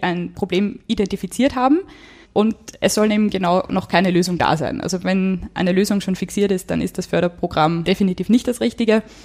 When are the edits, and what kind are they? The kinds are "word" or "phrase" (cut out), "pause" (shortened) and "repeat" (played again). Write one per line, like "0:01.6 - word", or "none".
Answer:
none